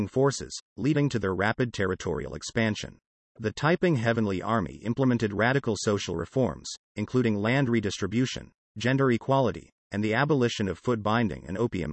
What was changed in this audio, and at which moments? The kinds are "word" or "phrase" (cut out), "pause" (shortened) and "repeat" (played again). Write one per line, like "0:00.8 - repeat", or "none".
0:03.1 - pause

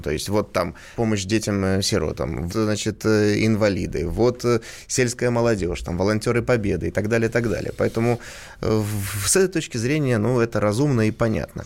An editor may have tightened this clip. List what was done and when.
0:00.9 - phrase
0:02.5 - word

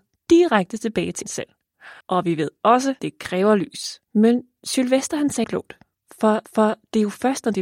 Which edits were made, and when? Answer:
0:01.2 - word
0:02.0 - pause
0:03.0 - word
0:04.1 - pause
0:05.4 - word
0:06.4 - repeat

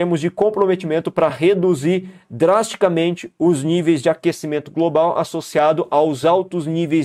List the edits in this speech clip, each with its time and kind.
none

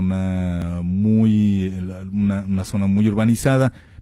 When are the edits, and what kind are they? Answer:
none

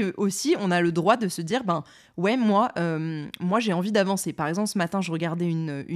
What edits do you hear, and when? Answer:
none

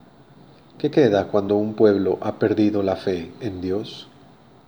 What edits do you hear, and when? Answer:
none

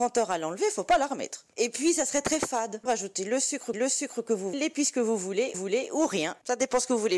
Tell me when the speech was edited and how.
0:02.9 - phrase
0:03.7 - repeat
0:04.5 - word
0:05.5 - repeat

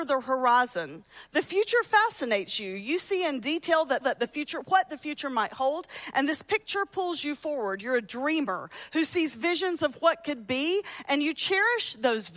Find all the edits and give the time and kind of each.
0:04.0 - repeat

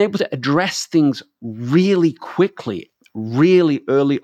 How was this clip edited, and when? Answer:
none

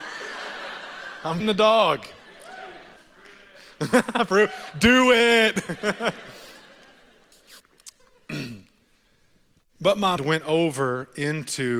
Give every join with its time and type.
0:01.4 - word
0:03.0 - pause
0:07.6 - pause
0:10.2 - word

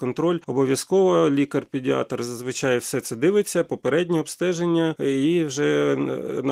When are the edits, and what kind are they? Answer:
none

